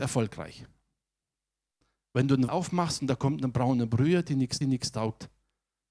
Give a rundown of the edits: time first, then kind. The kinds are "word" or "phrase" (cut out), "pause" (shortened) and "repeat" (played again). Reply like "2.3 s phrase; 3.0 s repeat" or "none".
2.5 s word; 4.6 s repeat

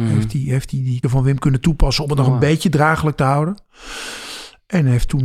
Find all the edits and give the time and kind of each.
1.0 s word

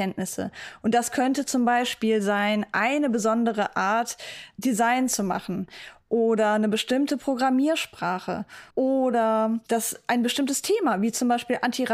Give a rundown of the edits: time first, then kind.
8.7 s pause

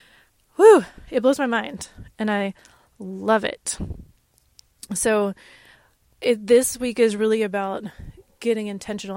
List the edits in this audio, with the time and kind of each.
none

